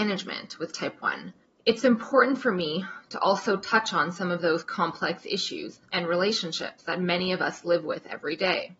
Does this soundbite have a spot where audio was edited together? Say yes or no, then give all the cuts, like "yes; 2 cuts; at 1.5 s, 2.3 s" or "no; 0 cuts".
yes; 1 cut; at 1.4 s